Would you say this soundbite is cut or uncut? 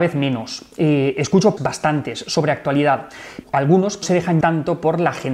cut